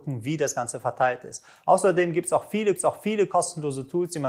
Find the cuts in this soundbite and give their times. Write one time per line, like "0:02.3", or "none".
0:02.8